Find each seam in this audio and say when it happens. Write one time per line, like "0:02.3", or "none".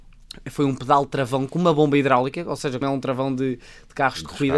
0:02.8

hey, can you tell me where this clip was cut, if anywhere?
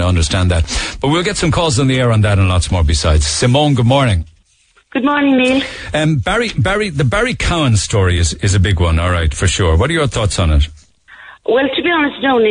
none

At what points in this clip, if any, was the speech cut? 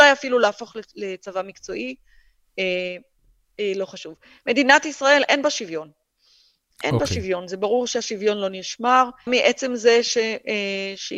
0:09.3

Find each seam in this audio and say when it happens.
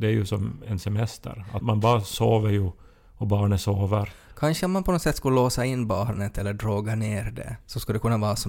0:01.6

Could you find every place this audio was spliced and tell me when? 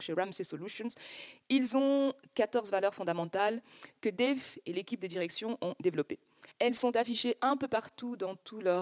0:06.5

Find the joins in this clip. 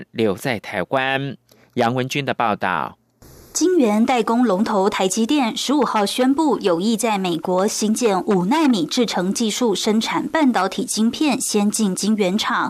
none

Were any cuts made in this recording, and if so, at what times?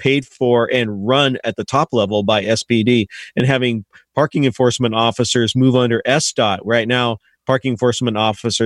none

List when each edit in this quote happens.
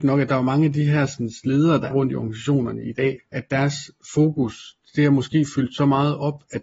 0:01.9
0:03.2

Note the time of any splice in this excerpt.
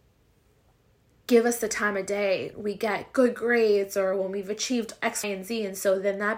0:02.5
0:05.2

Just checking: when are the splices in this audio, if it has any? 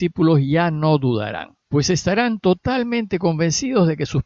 0:01.7

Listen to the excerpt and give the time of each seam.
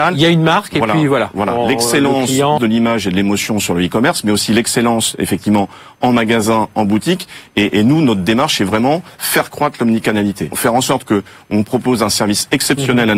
0:02.6
0:10.5

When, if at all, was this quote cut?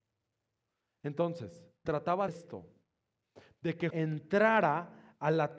0:01.9
0:02.3
0:03.9

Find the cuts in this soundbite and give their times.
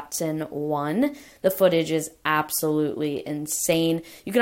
none

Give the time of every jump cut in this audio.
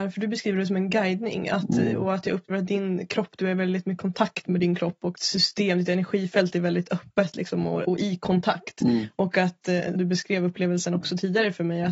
0:02.5
0:04.0
0:05.1
0:07.8
0:09.9

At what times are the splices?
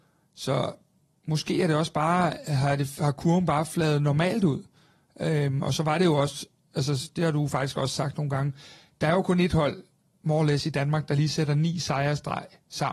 none

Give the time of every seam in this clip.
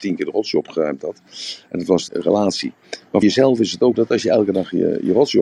0:02.1
0:03.2
0:03.9

